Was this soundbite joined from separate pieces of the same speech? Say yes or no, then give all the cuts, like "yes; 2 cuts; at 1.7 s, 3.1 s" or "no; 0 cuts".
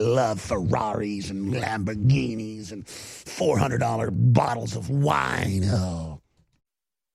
no; 0 cuts